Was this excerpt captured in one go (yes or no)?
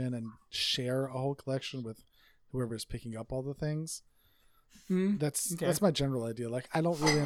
yes